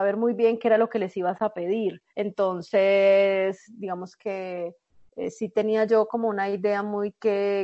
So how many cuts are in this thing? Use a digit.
1